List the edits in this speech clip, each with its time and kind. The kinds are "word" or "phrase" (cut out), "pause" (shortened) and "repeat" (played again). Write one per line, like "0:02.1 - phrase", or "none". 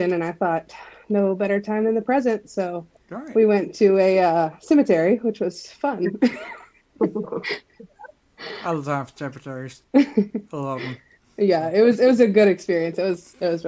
0:09.8 - pause